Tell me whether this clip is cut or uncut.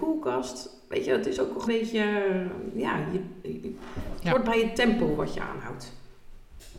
cut